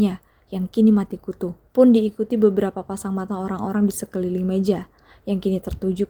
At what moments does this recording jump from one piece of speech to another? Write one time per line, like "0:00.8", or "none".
0:01.7